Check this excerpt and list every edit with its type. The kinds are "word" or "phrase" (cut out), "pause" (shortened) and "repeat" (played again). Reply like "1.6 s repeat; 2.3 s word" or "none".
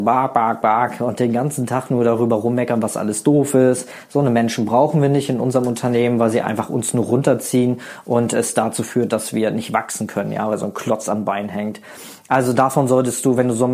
none

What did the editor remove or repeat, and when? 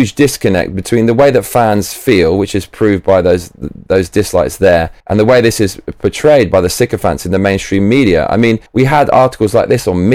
5.0 s pause; 8.7 s pause

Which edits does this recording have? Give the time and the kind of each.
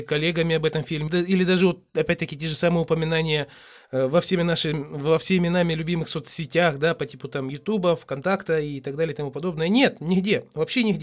1.1 s word

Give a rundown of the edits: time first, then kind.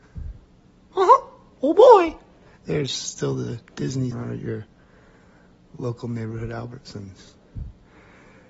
4.1 s phrase

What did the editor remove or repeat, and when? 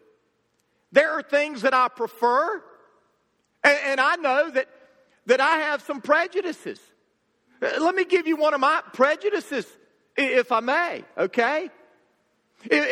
none

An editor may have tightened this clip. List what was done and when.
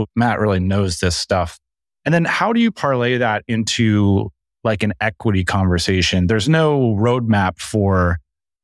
none

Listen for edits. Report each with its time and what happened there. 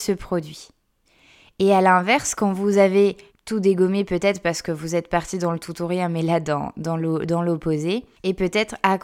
1.0 s pause; 3.3 s pause

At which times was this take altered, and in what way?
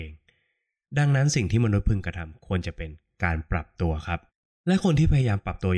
4.3 s pause

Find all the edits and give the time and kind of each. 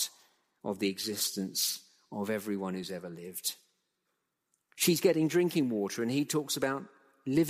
none

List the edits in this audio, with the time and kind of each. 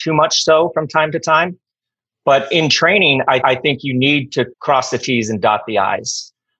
3.4 s repeat; 4.5 s pause

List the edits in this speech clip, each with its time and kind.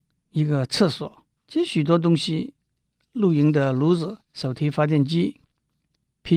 1.4 s pause; 4.2 s pause

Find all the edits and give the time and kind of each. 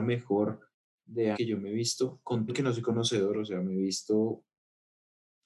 1.0 s word; 1.3 s word; 2.5 s word

